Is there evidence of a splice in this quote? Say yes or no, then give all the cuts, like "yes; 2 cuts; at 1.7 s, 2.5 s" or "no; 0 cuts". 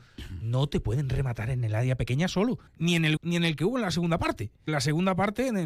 yes; 3 cuts; at 2.7 s, 3.2 s, 4.7 s